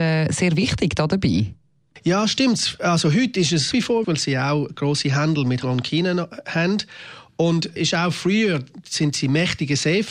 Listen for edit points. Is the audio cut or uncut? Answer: cut